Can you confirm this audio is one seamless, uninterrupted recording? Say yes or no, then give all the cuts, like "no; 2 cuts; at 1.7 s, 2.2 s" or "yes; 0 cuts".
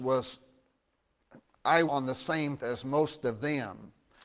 no; 2 cuts; at 1.9 s, 2.6 s